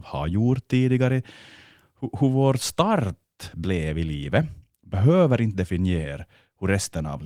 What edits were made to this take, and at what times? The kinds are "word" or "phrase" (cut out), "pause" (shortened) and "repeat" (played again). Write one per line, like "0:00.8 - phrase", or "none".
none